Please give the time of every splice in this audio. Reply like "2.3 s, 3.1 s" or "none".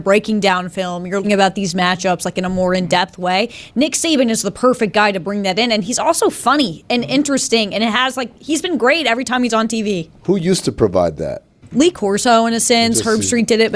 1.2 s